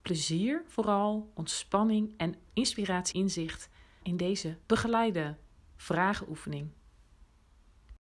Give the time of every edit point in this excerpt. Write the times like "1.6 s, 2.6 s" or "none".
2.5 s, 3.1 s, 4.0 s, 4.6 s